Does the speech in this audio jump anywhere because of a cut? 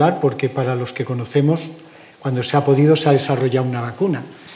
no; 0 cuts

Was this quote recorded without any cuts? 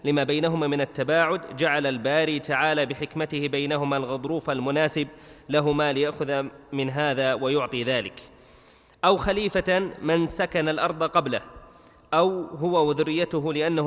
yes; 0 cuts

